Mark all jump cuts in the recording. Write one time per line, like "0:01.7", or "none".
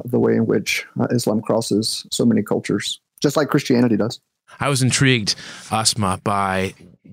none